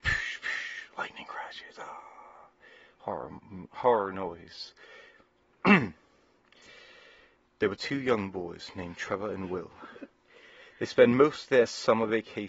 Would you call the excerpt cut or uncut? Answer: uncut